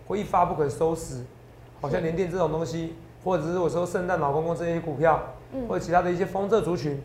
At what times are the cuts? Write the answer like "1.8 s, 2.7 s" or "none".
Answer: none